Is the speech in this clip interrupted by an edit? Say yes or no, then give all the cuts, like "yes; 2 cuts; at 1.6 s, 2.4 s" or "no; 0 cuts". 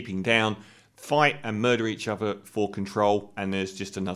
no; 0 cuts